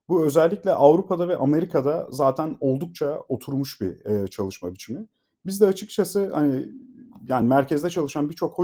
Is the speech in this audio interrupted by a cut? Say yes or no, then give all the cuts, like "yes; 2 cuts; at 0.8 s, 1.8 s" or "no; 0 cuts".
no; 0 cuts